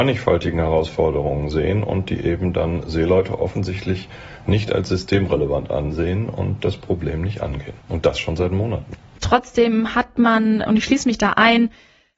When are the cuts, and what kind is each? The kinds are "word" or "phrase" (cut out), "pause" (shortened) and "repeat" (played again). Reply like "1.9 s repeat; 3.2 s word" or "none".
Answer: 7.8 s pause